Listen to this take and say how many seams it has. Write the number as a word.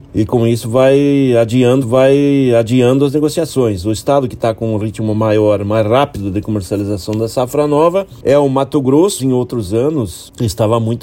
two